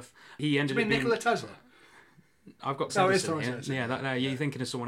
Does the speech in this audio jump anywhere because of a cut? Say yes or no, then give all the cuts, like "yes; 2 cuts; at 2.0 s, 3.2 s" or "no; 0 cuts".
yes; 1 cut; at 2.9 s